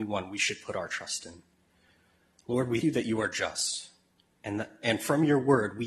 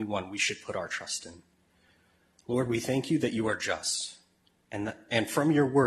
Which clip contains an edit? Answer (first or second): first